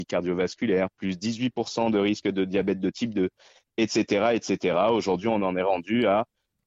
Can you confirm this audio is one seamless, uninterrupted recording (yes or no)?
yes